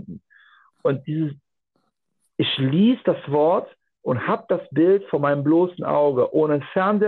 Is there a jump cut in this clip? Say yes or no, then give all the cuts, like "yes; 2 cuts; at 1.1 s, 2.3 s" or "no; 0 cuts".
no; 0 cuts